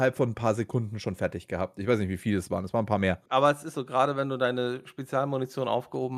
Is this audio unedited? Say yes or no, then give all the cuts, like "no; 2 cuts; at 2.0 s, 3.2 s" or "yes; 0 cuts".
no; 2 cuts; at 3.3 s, 3.7 s